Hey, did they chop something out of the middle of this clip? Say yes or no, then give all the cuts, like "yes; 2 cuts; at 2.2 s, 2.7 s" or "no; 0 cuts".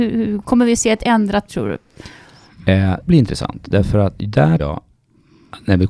yes; 3 cuts; at 1.5 s, 3.1 s, 4.6 s